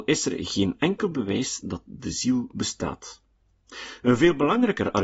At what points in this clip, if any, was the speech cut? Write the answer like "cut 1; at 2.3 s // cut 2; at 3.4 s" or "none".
none